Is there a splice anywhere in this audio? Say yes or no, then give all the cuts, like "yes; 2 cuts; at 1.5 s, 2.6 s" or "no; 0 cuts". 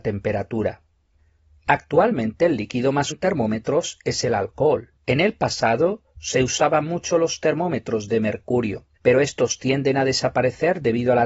yes; 3 cuts; at 3.1 s, 5.0 s, 9.0 s